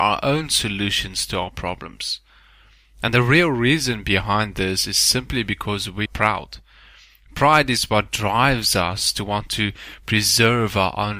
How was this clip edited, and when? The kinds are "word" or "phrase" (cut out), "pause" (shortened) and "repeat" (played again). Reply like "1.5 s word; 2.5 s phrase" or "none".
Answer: 6.1 s word